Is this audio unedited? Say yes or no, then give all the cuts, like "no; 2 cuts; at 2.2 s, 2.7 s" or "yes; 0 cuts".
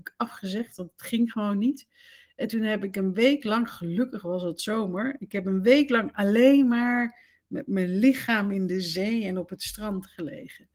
yes; 0 cuts